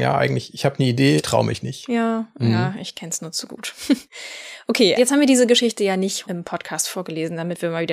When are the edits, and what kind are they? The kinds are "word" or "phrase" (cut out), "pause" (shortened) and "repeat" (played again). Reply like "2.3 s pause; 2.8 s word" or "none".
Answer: 1.2 s word; 4.1 s pause; 5.0 s word; 6.2 s word